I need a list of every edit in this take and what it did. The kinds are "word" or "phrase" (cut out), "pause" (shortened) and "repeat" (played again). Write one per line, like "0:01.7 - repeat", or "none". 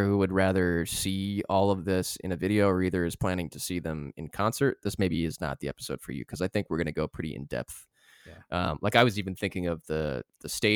none